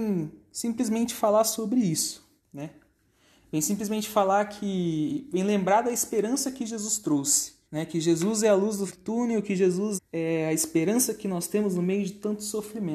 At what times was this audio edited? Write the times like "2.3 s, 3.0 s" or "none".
2.4 s, 7.6 s, 8.9 s, 10.0 s